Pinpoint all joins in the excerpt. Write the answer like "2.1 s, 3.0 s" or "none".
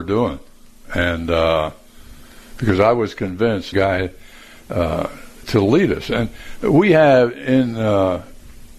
3.7 s, 5.4 s